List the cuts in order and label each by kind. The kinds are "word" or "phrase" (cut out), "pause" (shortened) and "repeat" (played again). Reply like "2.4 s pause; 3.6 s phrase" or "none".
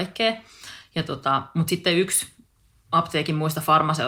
none